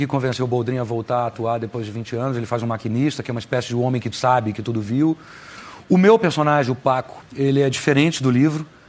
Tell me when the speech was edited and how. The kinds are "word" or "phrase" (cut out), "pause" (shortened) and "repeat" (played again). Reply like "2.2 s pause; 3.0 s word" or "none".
4.1 s word; 7.3 s pause